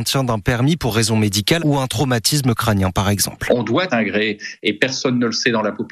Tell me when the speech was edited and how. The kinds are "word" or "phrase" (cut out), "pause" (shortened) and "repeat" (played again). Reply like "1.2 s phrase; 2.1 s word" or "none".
1.6 s phrase; 3.9 s phrase